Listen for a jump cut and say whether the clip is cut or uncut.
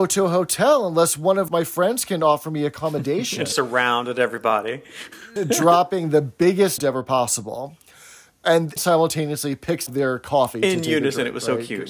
cut